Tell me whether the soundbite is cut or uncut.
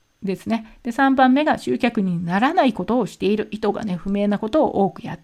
uncut